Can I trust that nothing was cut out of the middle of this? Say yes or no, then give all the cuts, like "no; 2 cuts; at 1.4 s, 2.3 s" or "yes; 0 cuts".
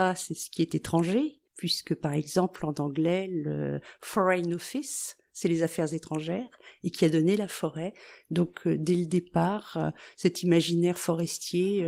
no; 1 cut; at 1.5 s